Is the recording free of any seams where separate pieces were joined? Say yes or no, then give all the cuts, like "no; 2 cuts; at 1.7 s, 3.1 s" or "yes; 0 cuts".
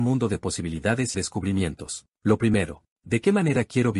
no; 3 cuts; at 1.1 s, 2.1 s, 2.9 s